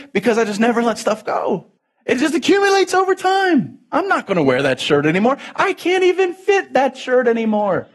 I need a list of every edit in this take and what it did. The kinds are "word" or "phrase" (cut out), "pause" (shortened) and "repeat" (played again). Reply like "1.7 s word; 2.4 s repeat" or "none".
1.8 s pause

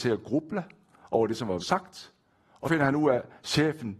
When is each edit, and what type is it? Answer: 1.6 s word; 2.6 s word

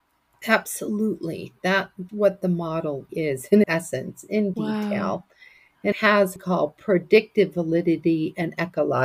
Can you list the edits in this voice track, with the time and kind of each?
2.1 s word; 3.1 s word; 3.6 s word; 4.5 s word; 5.9 s word; 6.4 s phrase; 6.8 s pause

